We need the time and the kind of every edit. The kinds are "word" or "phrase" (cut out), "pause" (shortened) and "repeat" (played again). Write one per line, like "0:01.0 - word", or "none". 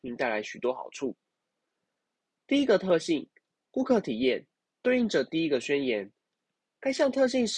none